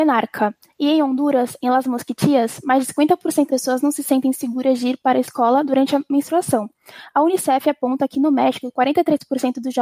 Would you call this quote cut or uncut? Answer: cut